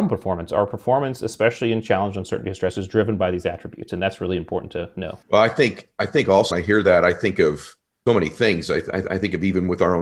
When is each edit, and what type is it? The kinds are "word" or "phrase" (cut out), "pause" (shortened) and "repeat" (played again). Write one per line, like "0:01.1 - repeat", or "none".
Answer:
0:05.2 - pause
0:06.5 - word
0:08.1 - word
0:09.0 - repeat